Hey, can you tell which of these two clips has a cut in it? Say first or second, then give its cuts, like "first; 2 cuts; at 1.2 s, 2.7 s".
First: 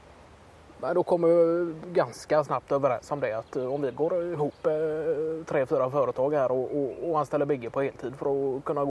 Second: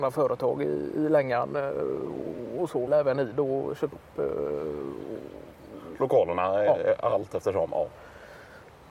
second; 2 cuts; at 2.9 s, 3.9 s